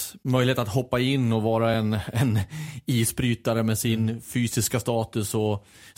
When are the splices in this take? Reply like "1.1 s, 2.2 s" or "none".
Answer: none